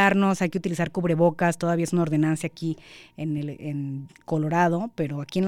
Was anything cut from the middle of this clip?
no; 0 cuts

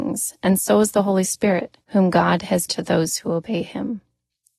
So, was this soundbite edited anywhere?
yes; 2 cuts; at 1.8 s, 2.7 s

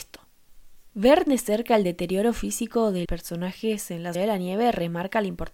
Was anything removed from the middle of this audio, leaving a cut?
yes; 3 cuts; at 1.3 s, 3.0 s, 4.1 s

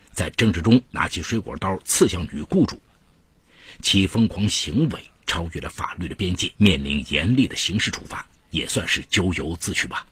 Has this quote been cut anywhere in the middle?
yes; 2 cuts; at 6.5 s, 8.4 s

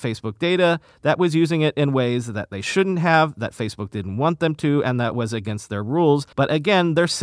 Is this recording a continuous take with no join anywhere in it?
no; 1 cut; at 6.3 s

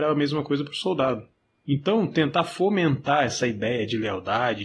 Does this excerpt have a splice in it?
no; 0 cuts

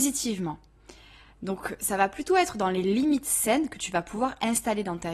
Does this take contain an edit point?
no; 0 cuts

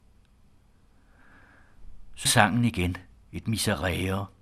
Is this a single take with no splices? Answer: no; 2 cuts; at 2.3 s, 3.2 s

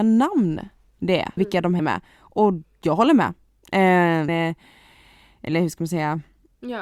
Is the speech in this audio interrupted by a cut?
yes; 3 cuts; at 1.4 s, 1.8 s, 4.3 s

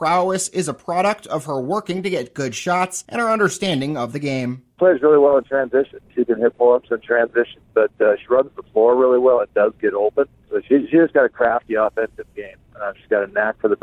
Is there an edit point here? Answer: no; 0 cuts

